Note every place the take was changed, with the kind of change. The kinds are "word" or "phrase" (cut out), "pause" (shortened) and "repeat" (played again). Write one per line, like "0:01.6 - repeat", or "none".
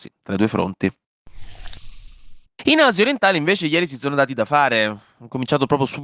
0:02.5 - pause